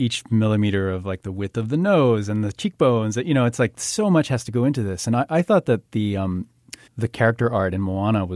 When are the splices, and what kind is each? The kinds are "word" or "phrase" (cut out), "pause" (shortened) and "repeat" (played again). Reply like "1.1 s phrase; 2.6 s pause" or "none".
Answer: 6.9 s pause